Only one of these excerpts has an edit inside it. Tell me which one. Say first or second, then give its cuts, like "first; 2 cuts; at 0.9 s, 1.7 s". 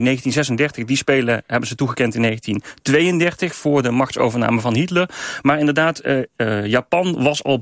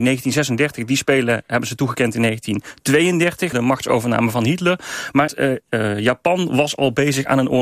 second; 2 cuts; at 3.5 s, 5.3 s